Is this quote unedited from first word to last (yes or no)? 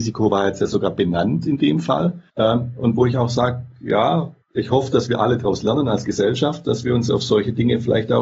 no